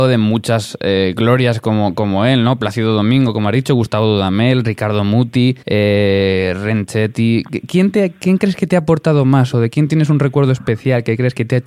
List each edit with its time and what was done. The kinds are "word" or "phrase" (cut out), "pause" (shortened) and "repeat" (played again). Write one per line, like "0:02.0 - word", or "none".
0:05.6 - pause

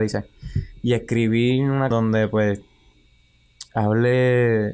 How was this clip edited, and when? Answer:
0:01.9 - word

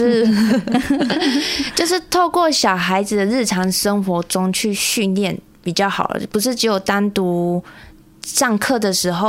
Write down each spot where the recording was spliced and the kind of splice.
none

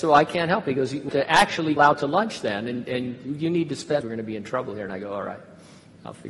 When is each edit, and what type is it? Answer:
0:01.1 - phrase
0:01.8 - phrase
0:04.0 - phrase

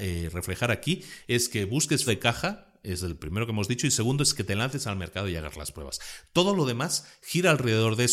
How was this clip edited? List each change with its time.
0:02.1 - word

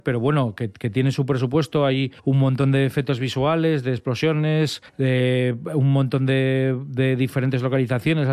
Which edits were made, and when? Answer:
0:02.2 - pause
0:04.9 - pause

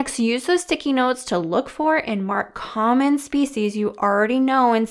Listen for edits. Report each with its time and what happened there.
none

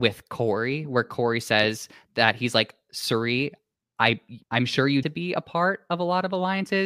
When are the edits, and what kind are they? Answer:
0:04.4 - pause
0:05.0 - phrase

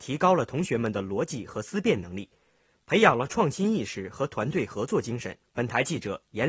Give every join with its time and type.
0:05.4 - pause

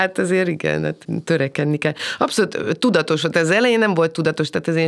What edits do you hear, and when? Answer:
none

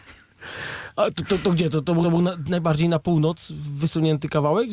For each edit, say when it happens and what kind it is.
0:01.1 - word
0:02.0 - repeat

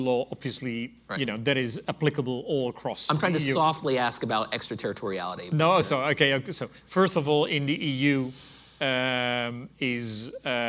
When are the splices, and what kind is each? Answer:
none

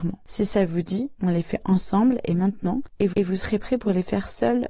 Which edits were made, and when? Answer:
0:03.1 - repeat

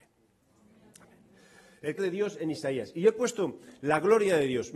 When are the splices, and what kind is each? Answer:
0:02.0 - word

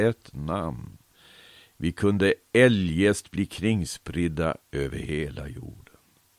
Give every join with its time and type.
none

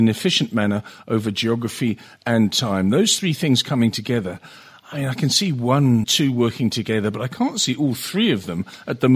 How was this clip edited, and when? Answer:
0:06.0 - word

